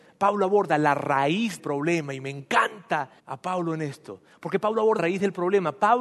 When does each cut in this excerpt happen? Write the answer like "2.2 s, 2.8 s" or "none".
1.6 s, 3.2 s, 5.0 s